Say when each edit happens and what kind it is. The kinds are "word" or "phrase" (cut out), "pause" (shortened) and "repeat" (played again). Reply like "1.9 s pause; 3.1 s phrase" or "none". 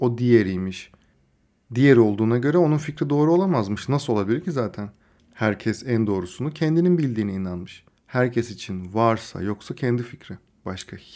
7.9 s pause